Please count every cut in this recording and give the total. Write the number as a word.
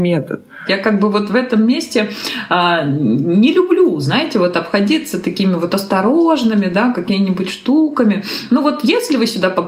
zero